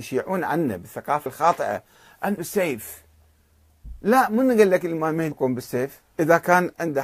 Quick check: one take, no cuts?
no; 4 cuts; at 1.3 s, 2.4 s, 5.3 s, 6.1 s

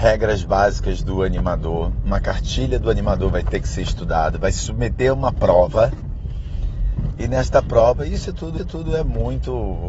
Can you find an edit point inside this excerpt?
yes; 1 cut; at 8.6 s

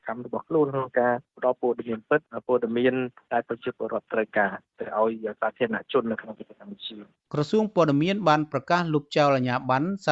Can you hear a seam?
no; 0 cuts

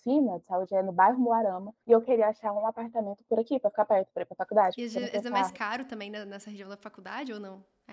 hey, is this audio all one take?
no; 1 cut; at 1.8 s

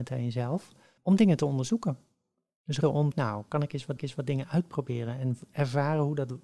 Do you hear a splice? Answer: yes; 4 cuts; at 1.0 s, 2.8 s, 3.1 s, 4.0 s

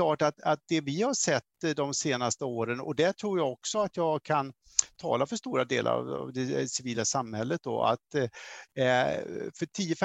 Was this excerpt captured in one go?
yes; 0 cuts

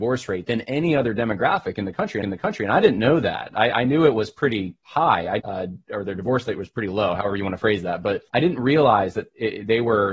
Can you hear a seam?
yes; 3 cuts; at 2.2 s, 5.4 s, 8.3 s

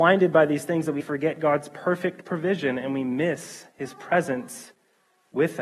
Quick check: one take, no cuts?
no; 1 cut; at 1.0 s

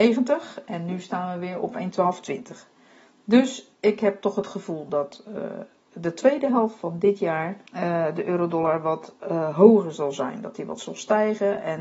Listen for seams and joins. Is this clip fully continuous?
no; 2 cuts; at 3.7 s, 7.7 s

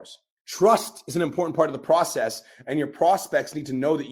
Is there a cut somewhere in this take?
no; 0 cuts

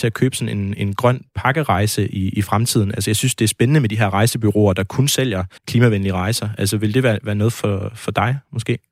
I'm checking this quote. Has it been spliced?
yes; 1 cut; at 5.6 s

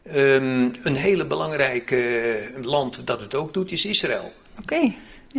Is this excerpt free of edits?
yes; 0 cuts

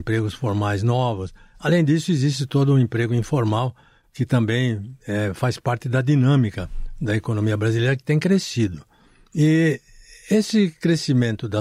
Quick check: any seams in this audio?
no; 0 cuts

